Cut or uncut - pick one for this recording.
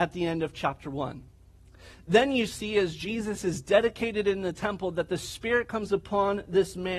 uncut